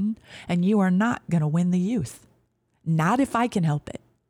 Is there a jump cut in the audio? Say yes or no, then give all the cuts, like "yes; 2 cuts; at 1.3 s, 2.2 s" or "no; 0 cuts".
no; 0 cuts